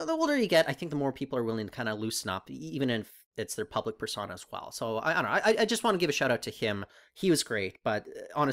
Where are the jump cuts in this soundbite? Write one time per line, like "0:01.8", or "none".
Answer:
none